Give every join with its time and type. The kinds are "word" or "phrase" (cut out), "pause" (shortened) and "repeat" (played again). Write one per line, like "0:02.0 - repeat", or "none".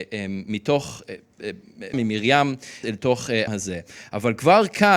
0:01.9 - word
0:02.8 - word
0:03.5 - word